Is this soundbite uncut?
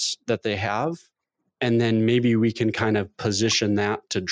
yes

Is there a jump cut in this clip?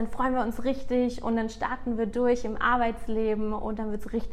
no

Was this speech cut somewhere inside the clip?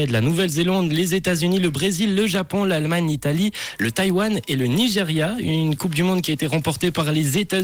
no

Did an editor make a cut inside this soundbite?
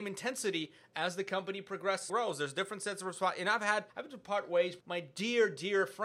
yes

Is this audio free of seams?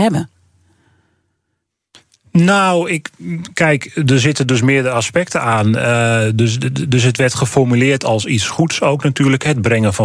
yes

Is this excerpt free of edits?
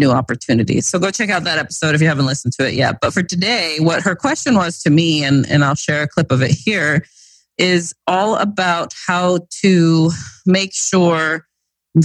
yes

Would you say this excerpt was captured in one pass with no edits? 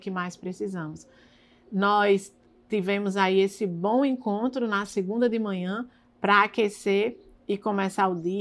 yes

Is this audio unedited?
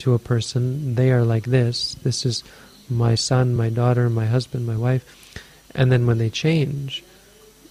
yes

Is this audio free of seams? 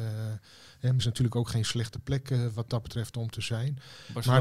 no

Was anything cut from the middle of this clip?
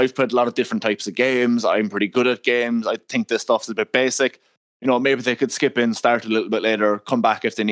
no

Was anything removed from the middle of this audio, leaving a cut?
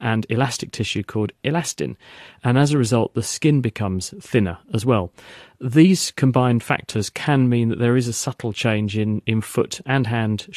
no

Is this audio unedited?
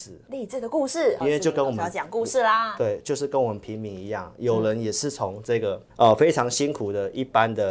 no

